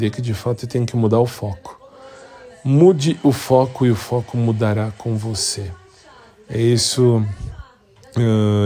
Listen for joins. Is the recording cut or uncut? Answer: uncut